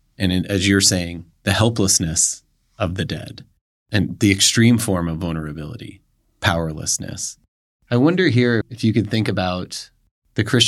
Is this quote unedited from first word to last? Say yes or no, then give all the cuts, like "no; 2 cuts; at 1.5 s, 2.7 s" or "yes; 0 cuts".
no; 1 cut; at 8.6 s